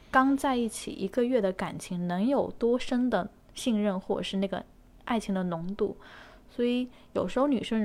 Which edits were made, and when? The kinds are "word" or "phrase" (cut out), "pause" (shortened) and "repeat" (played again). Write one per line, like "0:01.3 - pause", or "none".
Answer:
none

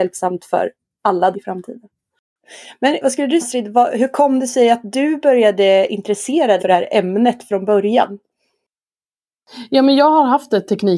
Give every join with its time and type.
0:01.3 - word
0:03.0 - word
0:03.4 - word
0:06.6 - word

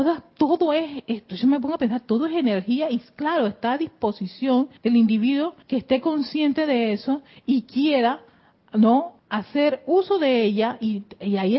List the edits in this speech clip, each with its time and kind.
0:04.8 - pause
0:05.6 - pause
0:09.2 - pause

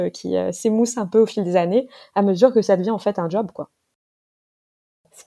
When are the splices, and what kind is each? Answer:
none

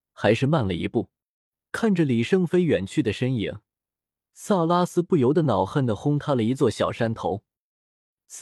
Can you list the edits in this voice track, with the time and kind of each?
none

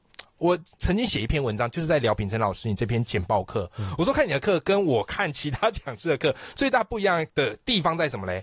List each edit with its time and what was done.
0:07.3 - pause

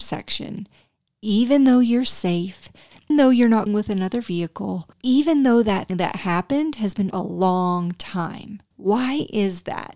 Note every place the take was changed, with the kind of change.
0:03.1 - word
0:03.7 - word
0:04.9 - pause
0:05.9 - word
0:07.1 - phrase
0:08.7 - pause

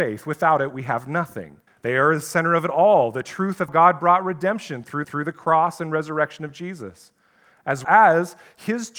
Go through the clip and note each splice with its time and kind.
0:01.7 - pause
0:03.7 - word
0:05.0 - repeat
0:07.8 - word

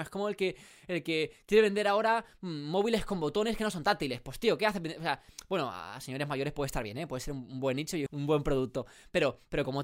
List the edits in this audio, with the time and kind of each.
0:08.1 - word

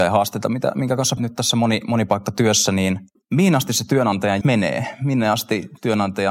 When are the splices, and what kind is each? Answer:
0:01.2 - word
0:04.4 - word

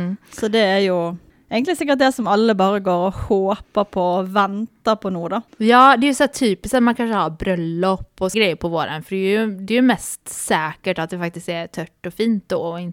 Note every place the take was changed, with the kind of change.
0:01.3 - pause
0:05.5 - pause
0:08.3 - word

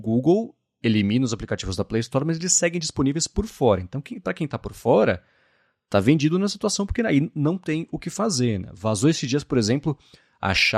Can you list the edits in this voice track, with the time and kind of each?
none

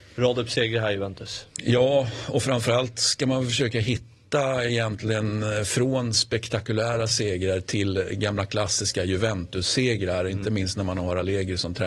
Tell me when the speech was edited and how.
none

